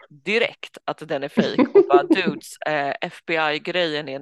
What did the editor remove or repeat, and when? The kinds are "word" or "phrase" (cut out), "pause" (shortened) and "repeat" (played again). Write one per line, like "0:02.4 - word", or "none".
none

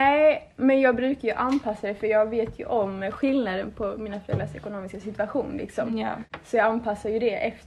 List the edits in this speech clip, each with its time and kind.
none

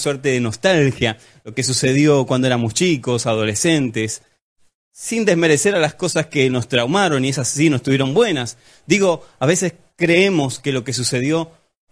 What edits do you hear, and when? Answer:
none

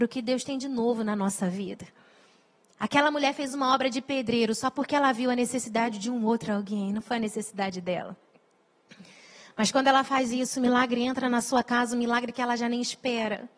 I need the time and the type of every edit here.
none

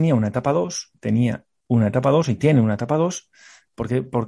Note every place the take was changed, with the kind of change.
0:00.9 - word

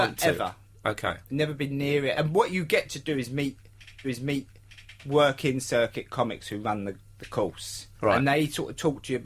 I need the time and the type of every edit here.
0:02.1 - word
0:04.0 - repeat
0:07.9 - pause

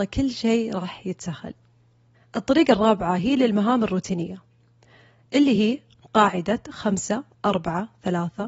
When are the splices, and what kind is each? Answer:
none

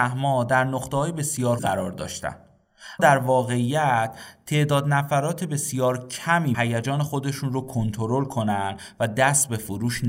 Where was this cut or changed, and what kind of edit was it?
0:01.6 - word
0:03.0 - word
0:06.5 - word

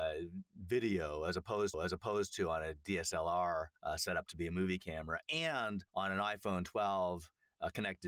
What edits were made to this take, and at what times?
0:01.7 - repeat
0:03.8 - pause
0:05.9 - pause

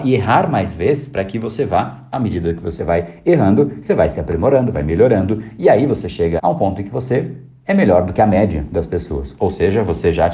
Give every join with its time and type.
0:06.4 - word

